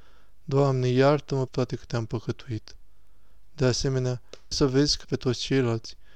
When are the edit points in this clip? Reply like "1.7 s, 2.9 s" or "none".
1.5 s, 4.5 s, 5.0 s

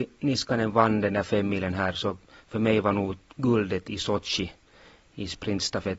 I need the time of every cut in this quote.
none

